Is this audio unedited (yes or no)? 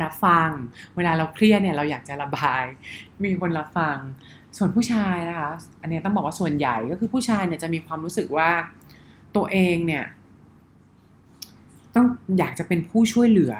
yes